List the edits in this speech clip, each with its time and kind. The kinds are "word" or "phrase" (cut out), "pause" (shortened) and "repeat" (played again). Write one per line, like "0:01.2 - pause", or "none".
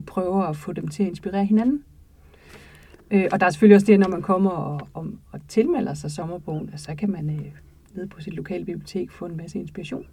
none